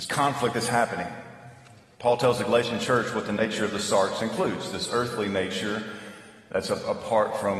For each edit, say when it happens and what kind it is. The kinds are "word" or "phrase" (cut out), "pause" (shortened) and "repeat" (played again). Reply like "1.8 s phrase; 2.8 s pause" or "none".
none